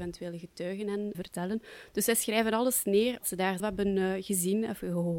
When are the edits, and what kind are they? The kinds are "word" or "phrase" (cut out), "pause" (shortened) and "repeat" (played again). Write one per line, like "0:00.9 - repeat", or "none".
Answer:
0:01.1 - word
0:03.2 - word
0:03.6 - word